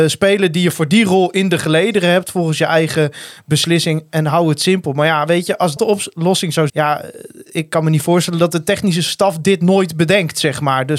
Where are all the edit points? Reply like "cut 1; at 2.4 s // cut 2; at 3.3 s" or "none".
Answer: cut 1; at 5.8 s // cut 2; at 6.7 s